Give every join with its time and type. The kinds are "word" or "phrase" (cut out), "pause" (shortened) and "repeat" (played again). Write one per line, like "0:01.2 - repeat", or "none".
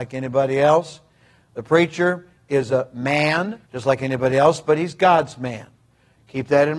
0:03.7 - pause

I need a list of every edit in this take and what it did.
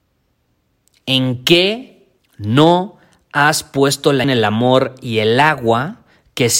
0:02.2 - pause
0:04.2 - word

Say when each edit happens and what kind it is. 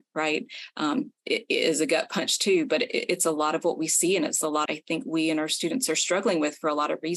0:04.7 - phrase

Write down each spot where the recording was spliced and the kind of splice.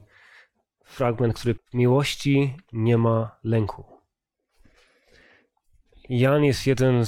0:01.6 - word

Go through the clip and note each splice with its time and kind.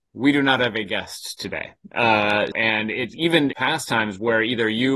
0:02.5 - word
0:03.1 - word
0:03.5 - phrase

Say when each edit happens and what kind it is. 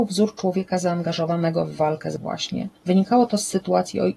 0:02.2 - word
0:02.8 - pause

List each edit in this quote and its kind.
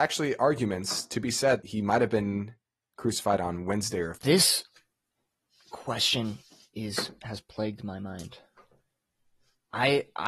0:01.6 - word
0:04.2 - word

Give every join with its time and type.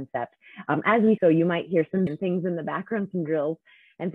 0:01.2 - word
0:02.1 - word

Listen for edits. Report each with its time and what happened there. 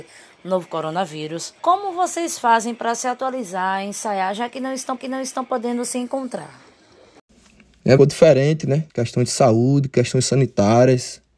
0:01.6 - pause
0:05.0 - repeat
0:08.0 - phrase
0:08.9 - pause

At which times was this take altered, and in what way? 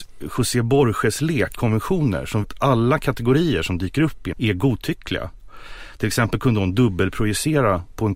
0:01.5 - word
0:02.4 - word
0:04.3 - word

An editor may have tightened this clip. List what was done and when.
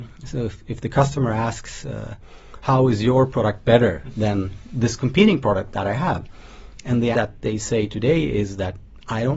0:02.6 - word
0:07.1 - word

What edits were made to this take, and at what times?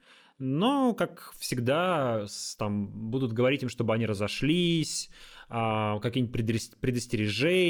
none

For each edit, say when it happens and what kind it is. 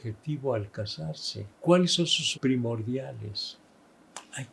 0:01.5 - pause
0:02.3 - word

